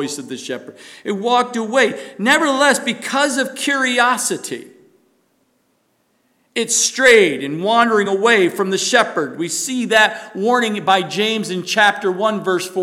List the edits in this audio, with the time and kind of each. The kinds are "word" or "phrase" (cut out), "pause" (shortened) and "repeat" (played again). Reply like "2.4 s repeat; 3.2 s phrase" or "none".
none